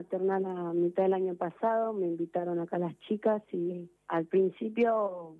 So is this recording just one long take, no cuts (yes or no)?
no